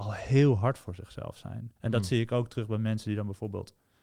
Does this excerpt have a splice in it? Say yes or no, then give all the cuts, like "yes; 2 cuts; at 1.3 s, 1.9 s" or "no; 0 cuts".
yes; 1 cut; at 1.8 s